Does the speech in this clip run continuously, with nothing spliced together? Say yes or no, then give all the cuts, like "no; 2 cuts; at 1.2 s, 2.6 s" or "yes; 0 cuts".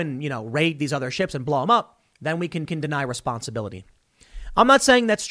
no; 1 cut; at 2.7 s